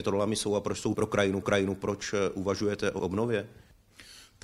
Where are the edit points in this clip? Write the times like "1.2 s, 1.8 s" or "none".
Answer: 0.9 s, 1.4 s, 3.0 s